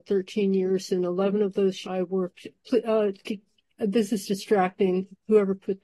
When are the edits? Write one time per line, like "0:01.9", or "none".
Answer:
0:01.8